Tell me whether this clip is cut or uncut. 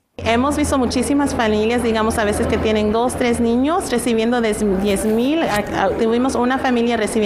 uncut